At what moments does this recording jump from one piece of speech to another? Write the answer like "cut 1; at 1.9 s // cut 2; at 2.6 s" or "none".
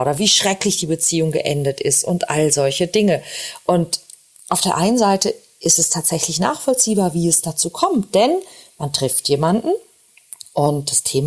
none